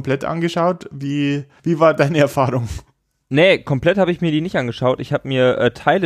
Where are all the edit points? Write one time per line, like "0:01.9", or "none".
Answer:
0:01.6